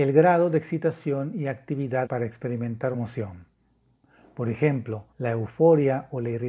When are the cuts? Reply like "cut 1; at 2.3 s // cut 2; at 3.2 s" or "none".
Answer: cut 1; at 2.1 s // cut 2; at 2.9 s // cut 3; at 5.1 s